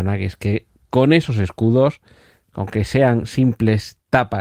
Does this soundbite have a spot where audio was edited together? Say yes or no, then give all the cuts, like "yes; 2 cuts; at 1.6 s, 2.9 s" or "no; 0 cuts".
no; 0 cuts